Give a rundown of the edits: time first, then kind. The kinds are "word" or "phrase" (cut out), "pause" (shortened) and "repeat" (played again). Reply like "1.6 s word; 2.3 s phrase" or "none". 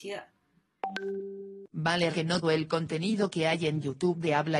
2.1 s word; 2.4 s word